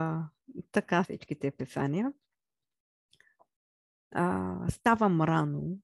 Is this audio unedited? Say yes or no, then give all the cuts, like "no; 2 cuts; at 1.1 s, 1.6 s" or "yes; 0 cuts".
no; 1 cut; at 1.0 s